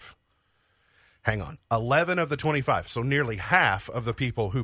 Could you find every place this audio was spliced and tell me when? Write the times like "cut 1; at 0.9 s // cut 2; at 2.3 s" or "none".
none